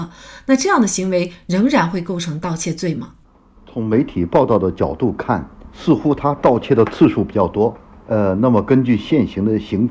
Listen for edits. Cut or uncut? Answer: uncut